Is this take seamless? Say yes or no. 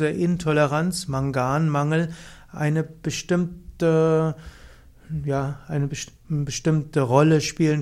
yes